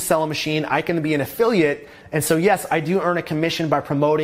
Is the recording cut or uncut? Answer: uncut